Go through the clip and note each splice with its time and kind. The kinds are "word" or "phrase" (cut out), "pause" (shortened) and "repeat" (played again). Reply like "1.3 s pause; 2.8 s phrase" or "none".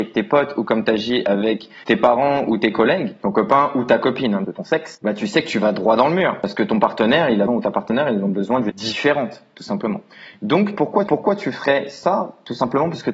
1.8 s pause; 4.4 s word; 7.5 s word; 8.7 s word; 11.1 s repeat